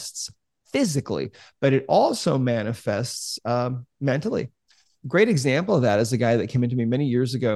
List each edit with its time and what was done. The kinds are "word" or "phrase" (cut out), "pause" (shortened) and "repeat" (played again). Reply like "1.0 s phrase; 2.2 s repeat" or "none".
none